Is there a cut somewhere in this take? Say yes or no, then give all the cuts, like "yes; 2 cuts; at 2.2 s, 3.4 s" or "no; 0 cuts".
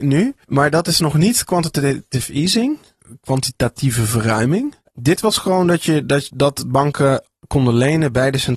yes; 2 cuts; at 4.8 s, 7.4 s